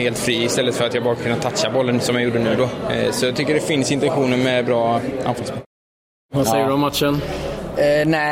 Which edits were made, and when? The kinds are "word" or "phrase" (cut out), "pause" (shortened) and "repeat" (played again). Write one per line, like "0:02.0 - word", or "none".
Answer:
none